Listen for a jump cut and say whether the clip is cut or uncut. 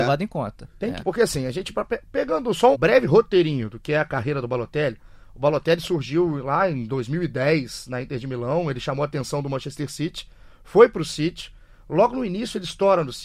cut